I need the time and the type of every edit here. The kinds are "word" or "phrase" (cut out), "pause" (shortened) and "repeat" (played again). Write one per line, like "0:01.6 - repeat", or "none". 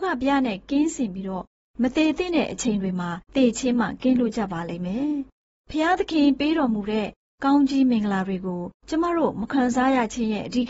0:03.2 - pause
0:08.8 - pause